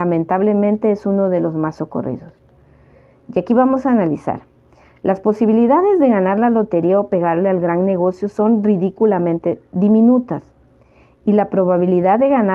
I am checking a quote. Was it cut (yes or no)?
no